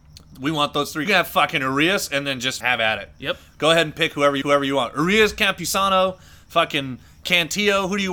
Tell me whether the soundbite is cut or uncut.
cut